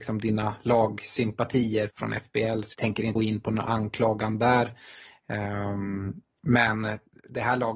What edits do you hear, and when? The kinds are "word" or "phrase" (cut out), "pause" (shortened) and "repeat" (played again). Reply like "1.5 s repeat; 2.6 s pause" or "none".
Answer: 1.9 s word; 2.7 s word; 3.2 s word